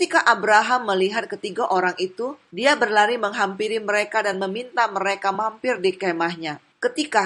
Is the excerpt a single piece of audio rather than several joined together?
yes; 0 cuts

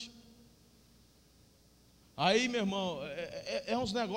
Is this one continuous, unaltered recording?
yes; 0 cuts

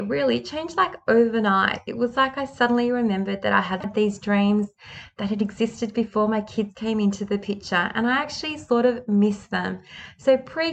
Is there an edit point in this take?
no; 0 cuts

